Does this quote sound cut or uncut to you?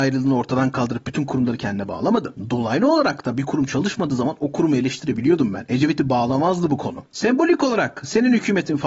uncut